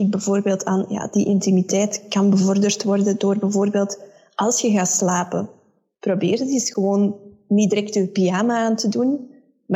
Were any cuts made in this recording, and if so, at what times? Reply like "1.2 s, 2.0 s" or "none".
none